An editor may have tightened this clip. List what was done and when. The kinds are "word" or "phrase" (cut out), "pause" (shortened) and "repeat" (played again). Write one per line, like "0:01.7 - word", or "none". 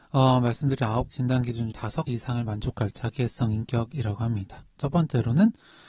0:01.1 - word
0:01.7 - word
0:02.1 - word
0:02.9 - word